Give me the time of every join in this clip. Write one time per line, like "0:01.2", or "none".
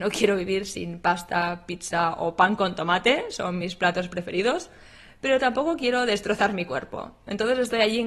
none